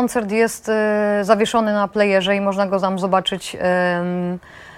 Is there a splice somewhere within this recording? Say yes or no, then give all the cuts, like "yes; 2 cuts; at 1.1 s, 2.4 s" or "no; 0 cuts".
no; 0 cuts